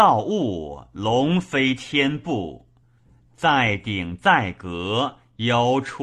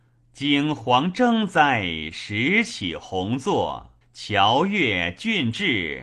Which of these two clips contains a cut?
second; 1 cut; at 4.0 s

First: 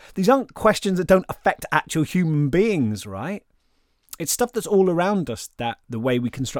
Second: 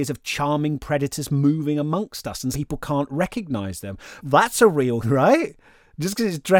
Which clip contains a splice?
second; 3 cuts; at 2.5 s, 4.2 s, 5.0 s

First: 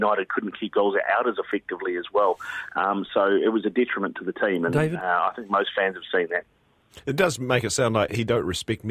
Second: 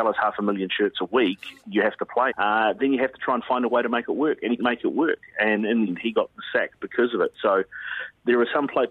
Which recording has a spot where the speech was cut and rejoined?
second; 3 cuts; at 2.3 s, 4.6 s, 5.9 s

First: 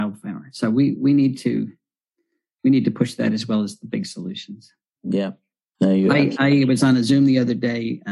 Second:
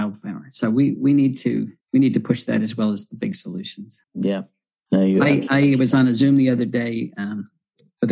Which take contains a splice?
second; 2 cuts; at 1.8 s, 4.0 s

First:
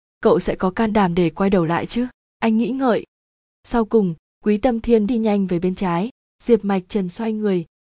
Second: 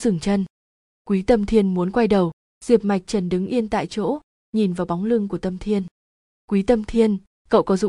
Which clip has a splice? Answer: first; 1 cut; at 5.1 s

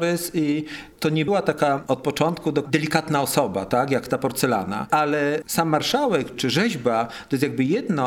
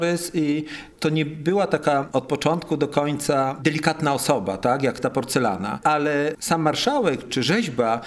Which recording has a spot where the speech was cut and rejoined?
first; 2 cuts; at 1.3 s, 2.6 s

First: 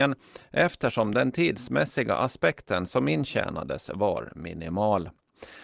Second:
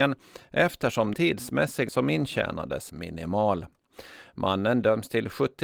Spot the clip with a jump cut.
second; 3 cuts; at 1.1 s, 1.9 s, 2.9 s

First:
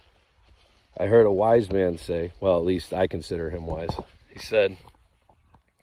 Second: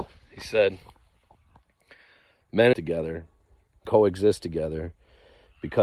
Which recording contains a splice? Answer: second; 2 cuts; at 2.7 s, 3.9 s

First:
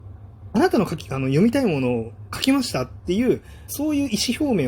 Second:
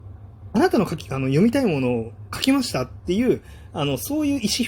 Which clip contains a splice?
first; 1 cut; at 3.7 s

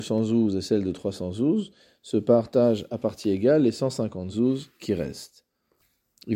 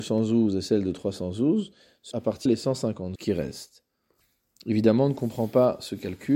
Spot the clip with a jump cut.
second; 3 cuts; at 2.1 s, 2.5 s, 3.2 s

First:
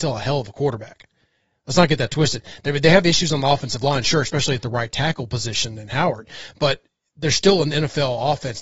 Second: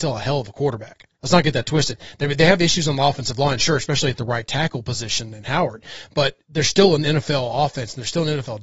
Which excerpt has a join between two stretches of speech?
second; 2 cuts; at 1.1 s, 6.4 s

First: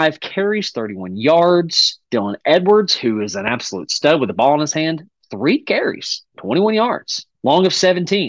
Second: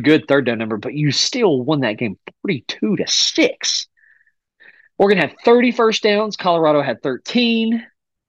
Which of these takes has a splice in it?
first; 2 cuts; at 6.3 s, 7.3 s

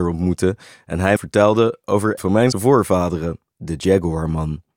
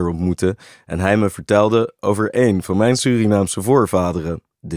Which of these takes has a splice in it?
first; 3 cuts; at 1.2 s, 2.2 s, 2.5 s

